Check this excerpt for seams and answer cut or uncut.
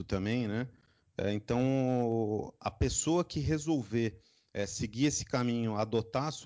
uncut